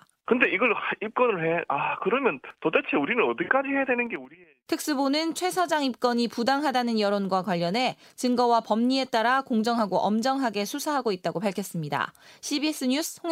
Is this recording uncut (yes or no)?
yes